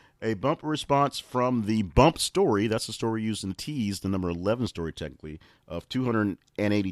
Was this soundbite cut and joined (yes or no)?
no